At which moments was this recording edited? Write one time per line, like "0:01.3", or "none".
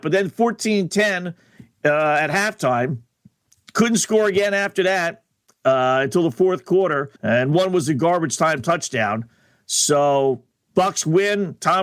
0:07.2